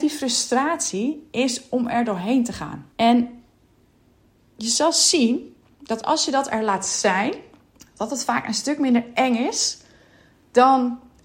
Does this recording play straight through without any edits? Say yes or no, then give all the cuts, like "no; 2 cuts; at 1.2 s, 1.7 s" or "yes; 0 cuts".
no; 2 cuts; at 2.9 s, 7.8 s